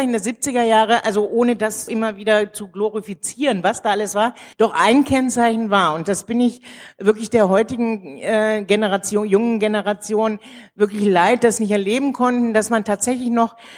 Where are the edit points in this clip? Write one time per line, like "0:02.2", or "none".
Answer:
0:01.9
0:04.5
0:11.6